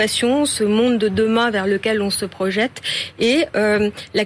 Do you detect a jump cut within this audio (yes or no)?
no